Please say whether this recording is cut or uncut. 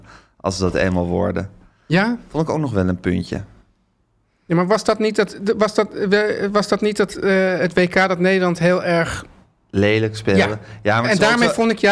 uncut